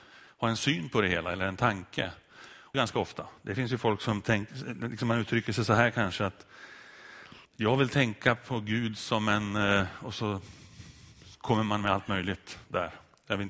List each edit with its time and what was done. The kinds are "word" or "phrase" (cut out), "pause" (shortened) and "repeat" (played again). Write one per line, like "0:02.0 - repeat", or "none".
0:02.7 - phrase
0:07.4 - pause